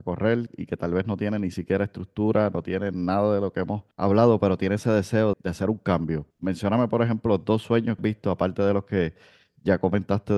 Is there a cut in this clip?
yes; 4 cuts; at 3.9 s, 5.3 s, 6.3 s, 8.0 s

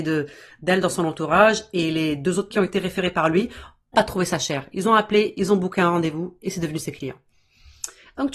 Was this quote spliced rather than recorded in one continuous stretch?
yes; 2 cuts; at 2.5 s, 3.9 s

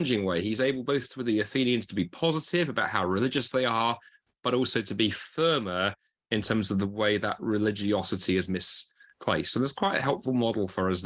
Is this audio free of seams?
yes; 0 cuts

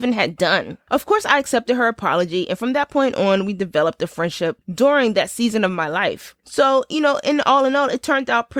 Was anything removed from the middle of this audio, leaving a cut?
no; 0 cuts

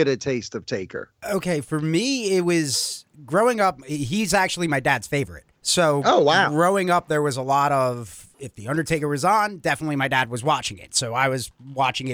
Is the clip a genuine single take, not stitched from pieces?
no; 2 cuts; at 5.6 s, 8.3 s

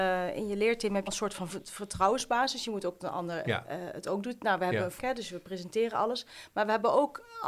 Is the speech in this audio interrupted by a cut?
yes; 4 cuts; at 1.1 s, 3.0 s, 3.4 s, 5.0 s

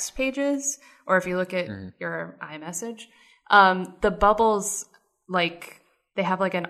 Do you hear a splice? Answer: no; 0 cuts

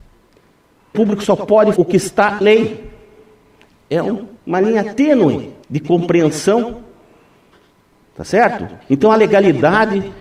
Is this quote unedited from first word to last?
no; 6 cuts; at 0.9 s, 1.8 s, 2.4 s, 4.4 s, 5.6 s, 8.8 s

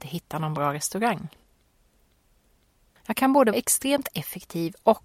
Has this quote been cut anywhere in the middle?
yes; 1 cut; at 3.5 s

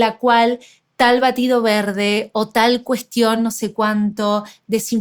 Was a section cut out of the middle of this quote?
no; 0 cuts

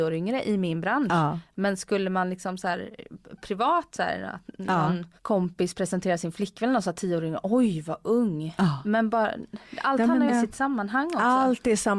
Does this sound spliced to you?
yes; 2 cuts; at 5.2 s, 10.3 s

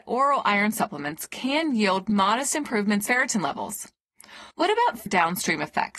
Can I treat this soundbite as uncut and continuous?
no; 3 cuts; at 3.1 s, 4.5 s, 5.1 s

